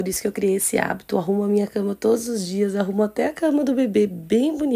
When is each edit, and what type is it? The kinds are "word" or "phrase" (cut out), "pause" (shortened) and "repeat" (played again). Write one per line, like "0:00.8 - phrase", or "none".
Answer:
none